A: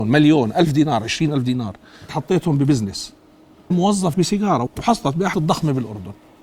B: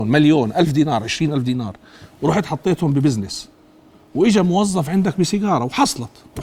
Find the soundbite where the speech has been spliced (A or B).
A